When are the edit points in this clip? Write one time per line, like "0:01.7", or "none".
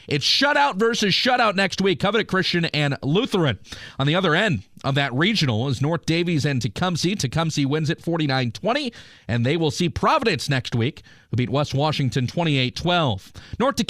none